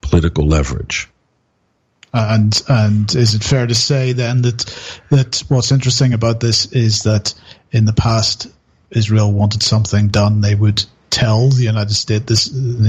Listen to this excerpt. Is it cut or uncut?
uncut